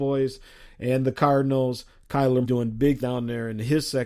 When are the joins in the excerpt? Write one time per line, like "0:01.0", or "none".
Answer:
0:02.4
0:03.0